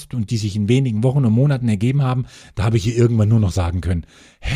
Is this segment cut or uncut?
uncut